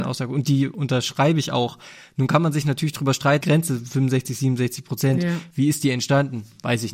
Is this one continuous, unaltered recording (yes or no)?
no